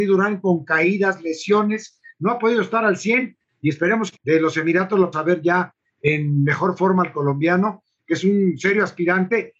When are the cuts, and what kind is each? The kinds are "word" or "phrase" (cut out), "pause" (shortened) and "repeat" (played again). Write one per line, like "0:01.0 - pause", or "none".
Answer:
0:04.2 - phrase
0:05.1 - word